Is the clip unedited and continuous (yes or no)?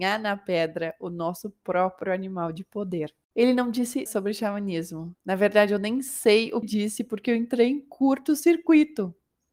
no